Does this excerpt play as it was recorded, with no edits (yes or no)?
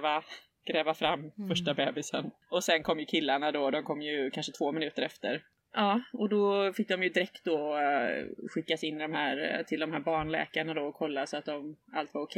yes